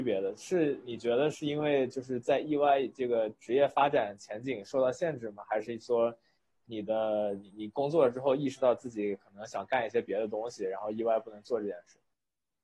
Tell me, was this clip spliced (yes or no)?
no